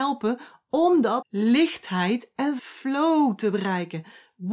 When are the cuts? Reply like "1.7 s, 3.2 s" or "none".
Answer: 1.2 s, 2.6 s